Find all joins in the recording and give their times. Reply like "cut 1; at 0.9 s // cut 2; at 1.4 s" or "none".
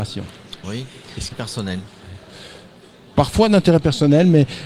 cut 1; at 1.3 s